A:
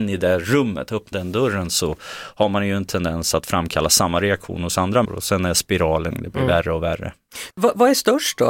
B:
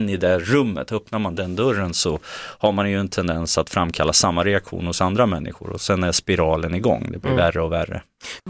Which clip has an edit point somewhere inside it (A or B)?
A